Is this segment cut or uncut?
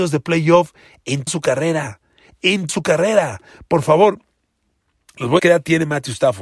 cut